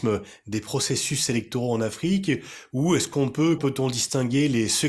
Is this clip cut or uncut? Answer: cut